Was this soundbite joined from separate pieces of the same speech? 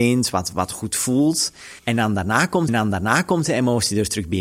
yes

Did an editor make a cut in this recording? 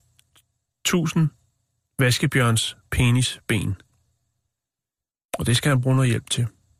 no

